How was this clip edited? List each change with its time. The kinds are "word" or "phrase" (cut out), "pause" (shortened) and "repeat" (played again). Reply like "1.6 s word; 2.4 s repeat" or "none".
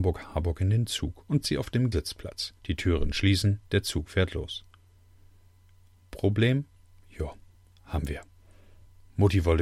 1.4 s word; 1.9 s word; 2.6 s pause; 3.7 s pause; 6.8 s pause